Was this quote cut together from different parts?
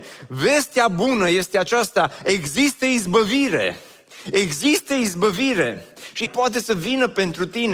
yes; 1 cut; at 6.3 s

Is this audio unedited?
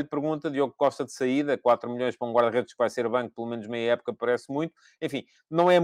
yes; 0 cuts

